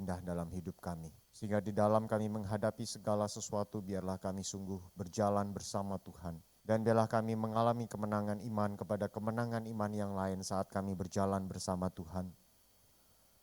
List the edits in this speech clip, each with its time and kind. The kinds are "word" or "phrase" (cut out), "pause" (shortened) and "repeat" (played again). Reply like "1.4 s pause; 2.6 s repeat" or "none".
1.2 s pause; 6.6 s pause